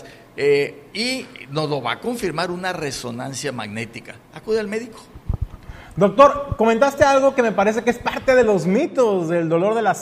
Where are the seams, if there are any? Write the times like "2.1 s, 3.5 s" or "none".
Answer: none